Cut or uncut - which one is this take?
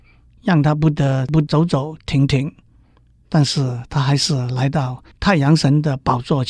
uncut